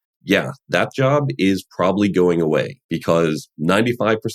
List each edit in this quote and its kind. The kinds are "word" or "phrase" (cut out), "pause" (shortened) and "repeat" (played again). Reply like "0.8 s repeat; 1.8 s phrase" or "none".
2.8 s pause